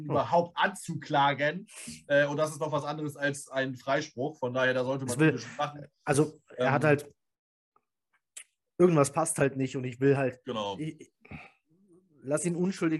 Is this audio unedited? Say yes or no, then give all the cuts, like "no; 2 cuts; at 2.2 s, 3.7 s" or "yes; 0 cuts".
yes; 0 cuts